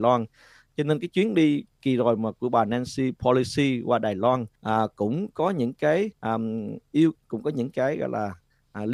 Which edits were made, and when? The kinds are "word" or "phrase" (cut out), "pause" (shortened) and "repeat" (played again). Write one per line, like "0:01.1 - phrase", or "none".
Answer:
0:04.6 - pause
0:06.2 - pause